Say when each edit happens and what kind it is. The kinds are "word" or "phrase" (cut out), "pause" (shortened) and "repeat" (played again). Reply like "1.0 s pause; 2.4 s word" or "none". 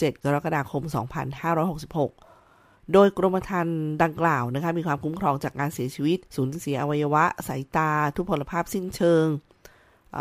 6.3 s pause